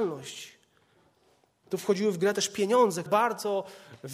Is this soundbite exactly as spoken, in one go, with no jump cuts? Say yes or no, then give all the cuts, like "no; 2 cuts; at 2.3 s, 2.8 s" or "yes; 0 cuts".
no; 1 cut; at 3.1 s